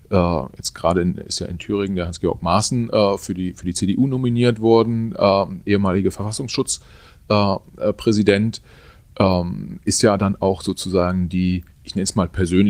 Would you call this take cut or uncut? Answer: cut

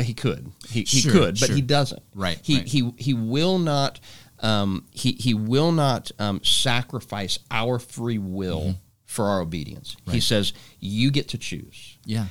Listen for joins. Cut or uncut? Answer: cut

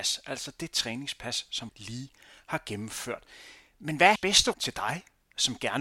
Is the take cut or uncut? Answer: cut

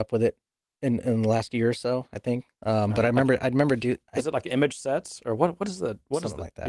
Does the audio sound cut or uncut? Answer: cut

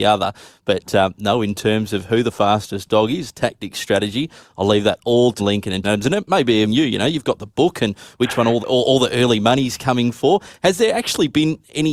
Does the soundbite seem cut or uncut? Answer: cut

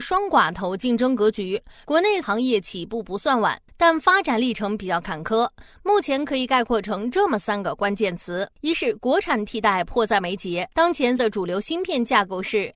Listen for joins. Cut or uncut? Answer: cut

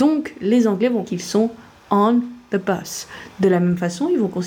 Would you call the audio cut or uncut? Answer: cut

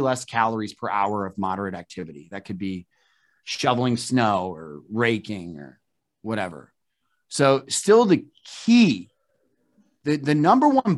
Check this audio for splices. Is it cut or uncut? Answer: uncut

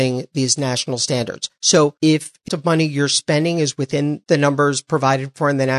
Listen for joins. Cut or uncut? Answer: cut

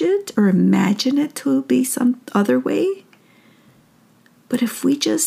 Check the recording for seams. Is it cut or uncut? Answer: uncut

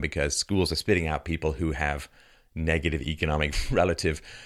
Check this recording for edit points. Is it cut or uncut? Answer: cut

